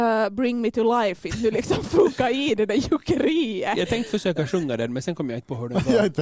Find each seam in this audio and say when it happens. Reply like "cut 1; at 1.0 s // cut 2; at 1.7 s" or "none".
none